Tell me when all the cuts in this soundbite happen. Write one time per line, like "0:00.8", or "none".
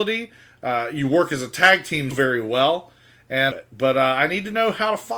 0:02.1
0:03.5